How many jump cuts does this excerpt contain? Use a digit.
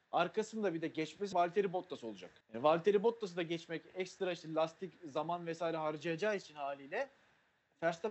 2